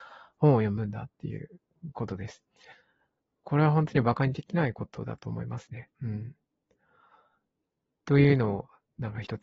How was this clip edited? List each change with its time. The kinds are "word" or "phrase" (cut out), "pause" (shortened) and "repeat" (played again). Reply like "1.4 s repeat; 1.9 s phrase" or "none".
5.9 s pause